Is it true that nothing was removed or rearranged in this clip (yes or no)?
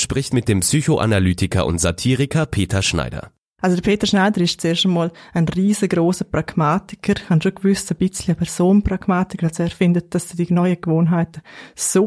yes